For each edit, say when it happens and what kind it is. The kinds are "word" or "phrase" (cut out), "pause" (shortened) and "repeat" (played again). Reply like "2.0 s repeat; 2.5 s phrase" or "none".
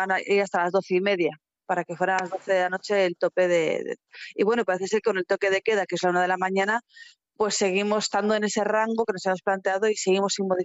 none